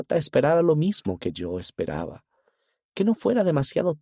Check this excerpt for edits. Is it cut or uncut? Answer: uncut